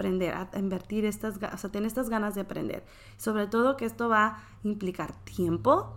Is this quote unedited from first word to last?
yes; 0 cuts

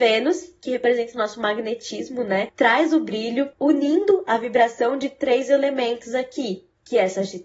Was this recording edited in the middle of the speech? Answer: no; 0 cuts

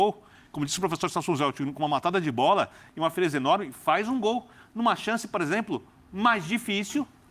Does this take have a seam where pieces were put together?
no; 0 cuts

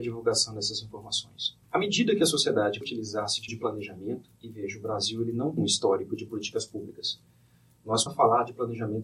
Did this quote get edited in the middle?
yes; 7 cuts; at 1.6 s, 2.8 s, 3.5 s, 4.4 s, 5.6 s, 6.3 s, 8.1 s

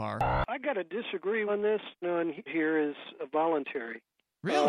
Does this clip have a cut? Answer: yes; 3 cuts; at 1.5 s, 2.0 s, 2.5 s

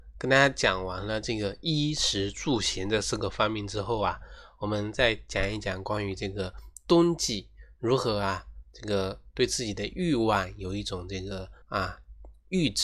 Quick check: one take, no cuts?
no; 1 cut; at 11.6 s

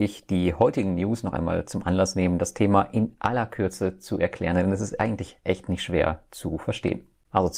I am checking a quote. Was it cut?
no; 0 cuts

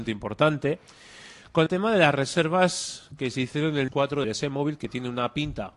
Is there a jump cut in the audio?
yes; 3 cuts; at 1.7 s, 3.9 s, 4.2 s

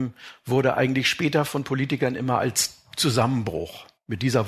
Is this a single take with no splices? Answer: yes; 0 cuts

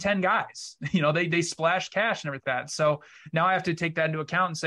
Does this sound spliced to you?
yes; 1 cut; at 2.4 s

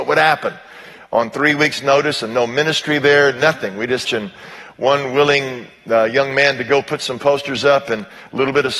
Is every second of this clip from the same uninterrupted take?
no; 1 cut; at 4.0 s

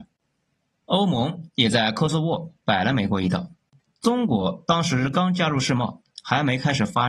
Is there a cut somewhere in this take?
yes; 1 cut; at 3.8 s

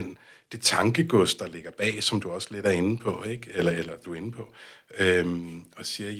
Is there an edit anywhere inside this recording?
yes; 1 cut; at 4.0 s

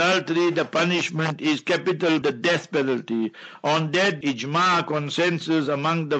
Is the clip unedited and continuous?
no; 2 cuts; at 2.2 s, 4.2 s

